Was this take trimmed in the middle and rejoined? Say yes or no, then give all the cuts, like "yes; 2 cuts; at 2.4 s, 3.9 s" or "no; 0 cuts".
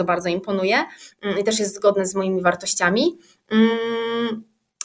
no; 0 cuts